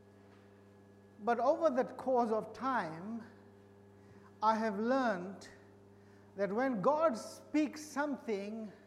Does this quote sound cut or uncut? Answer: uncut